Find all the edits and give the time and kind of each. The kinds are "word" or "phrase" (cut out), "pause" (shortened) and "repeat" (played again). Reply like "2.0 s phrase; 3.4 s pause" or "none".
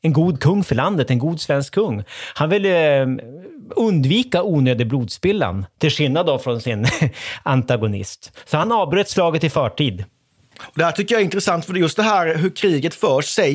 none